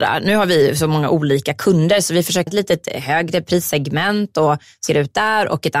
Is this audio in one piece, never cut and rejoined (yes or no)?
no